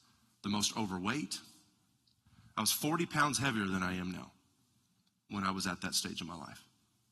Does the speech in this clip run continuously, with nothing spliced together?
yes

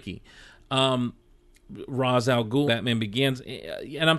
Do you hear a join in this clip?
yes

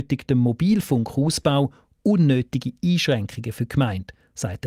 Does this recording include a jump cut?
no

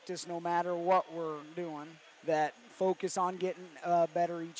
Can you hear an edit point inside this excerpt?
yes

